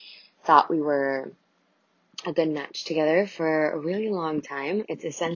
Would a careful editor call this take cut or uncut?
uncut